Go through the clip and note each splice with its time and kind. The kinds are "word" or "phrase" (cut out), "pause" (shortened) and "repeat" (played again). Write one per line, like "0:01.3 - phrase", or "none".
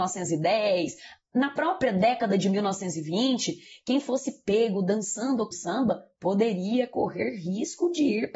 0:05.5 - word